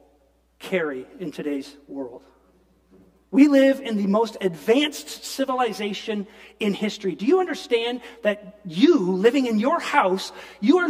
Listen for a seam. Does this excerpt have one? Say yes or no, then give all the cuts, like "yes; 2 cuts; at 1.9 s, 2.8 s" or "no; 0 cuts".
no; 0 cuts